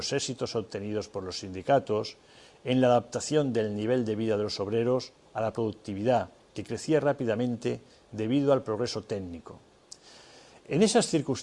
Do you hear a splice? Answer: no; 0 cuts

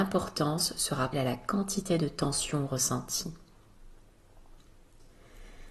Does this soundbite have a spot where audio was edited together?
yes; 1 cut; at 1.1 s

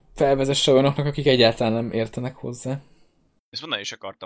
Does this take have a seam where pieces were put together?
no; 0 cuts

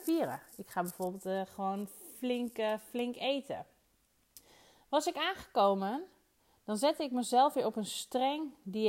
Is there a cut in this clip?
no; 0 cuts

